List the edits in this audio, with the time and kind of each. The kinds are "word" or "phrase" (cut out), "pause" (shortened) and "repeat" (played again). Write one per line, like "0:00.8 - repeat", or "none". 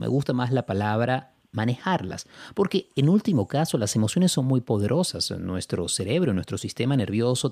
none